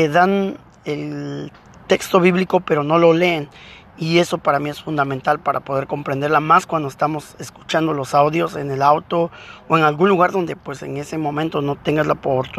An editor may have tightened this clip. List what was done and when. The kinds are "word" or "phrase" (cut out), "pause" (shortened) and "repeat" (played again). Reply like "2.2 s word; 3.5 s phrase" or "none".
none